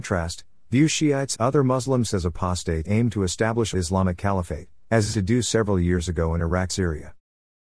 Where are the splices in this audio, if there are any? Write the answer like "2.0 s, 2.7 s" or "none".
1.3 s, 2.1 s, 2.8 s, 3.7 s, 5.1 s, 6.7 s